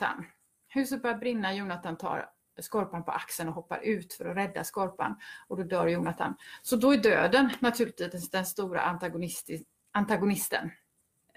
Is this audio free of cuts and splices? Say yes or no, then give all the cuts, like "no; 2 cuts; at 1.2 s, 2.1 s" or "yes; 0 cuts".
yes; 0 cuts